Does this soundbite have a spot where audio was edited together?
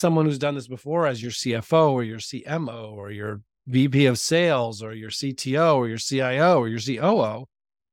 no; 0 cuts

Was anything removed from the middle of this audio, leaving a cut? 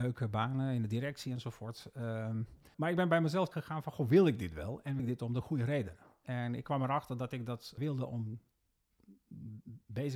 yes; 4 cuts; at 2.7 s, 3.5 s, 5.0 s, 7.8 s

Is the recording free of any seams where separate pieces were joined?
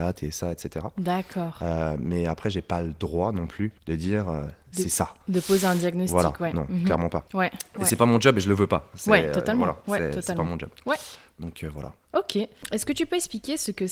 no; 2 cuts; at 3.8 s, 7.3 s

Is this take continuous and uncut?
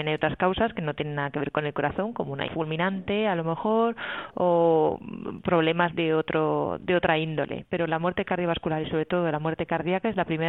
no; 2 cuts; at 2.5 s, 5.9 s

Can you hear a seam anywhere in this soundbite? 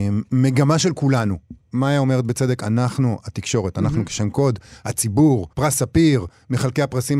yes; 1 cut; at 5.5 s

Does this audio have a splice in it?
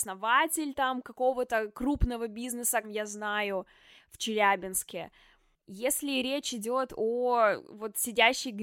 yes; 1 cut; at 2.8 s

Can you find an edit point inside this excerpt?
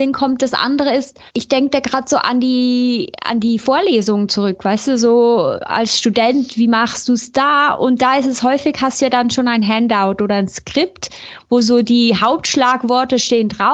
yes; 1 cut; at 1.3 s

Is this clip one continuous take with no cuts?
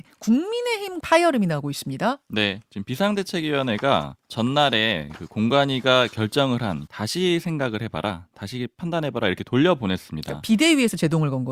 no; 3 cuts; at 1.0 s, 4.2 s, 6.9 s

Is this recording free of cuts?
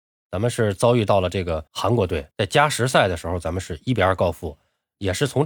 no; 2 cuts; at 1.7 s, 2.3 s

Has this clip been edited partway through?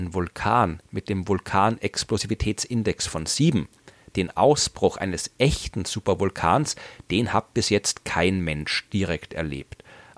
no; 0 cuts

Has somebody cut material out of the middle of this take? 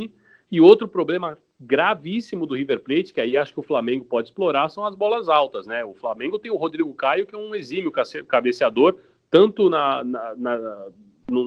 no; 0 cuts

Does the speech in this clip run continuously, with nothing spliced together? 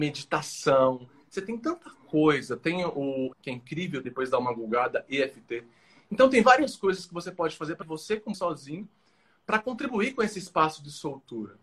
no; 4 cuts; at 3.3 s, 4.0 s, 7.8 s, 8.3 s

